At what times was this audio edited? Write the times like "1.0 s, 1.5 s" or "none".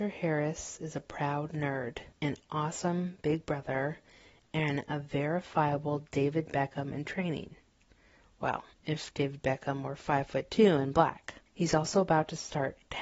2.1 s, 8.7 s, 11.5 s